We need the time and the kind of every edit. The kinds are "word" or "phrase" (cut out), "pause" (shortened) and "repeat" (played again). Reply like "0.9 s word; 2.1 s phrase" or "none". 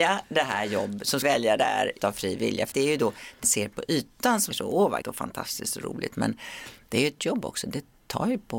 1.2 s word; 2.0 s word; 2.7 s word; 3.4 s word; 4.5 s word; 5.0 s word; 7.2 s word

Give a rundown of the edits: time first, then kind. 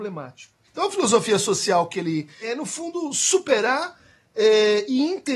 2.4 s phrase

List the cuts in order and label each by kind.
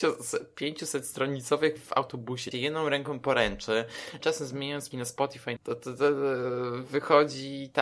1.8 s word; 2.5 s word; 4.2 s word; 4.9 s word; 5.6 s phrase

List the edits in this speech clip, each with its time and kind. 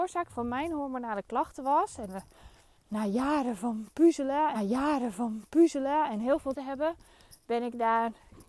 4.5 s repeat; 6.5 s phrase

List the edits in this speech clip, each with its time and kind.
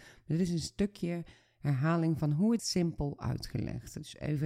2.6 s word

